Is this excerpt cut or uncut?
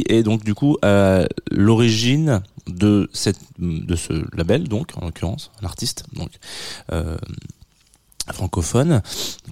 uncut